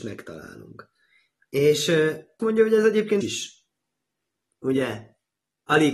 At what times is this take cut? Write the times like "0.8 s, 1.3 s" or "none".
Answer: 2.4 s, 3.2 s